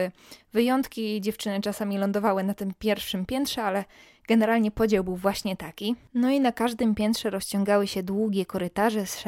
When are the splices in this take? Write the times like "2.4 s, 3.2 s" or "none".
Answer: none

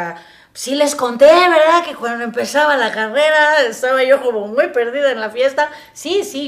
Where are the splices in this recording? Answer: none

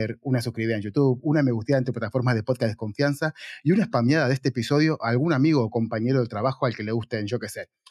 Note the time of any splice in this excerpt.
none

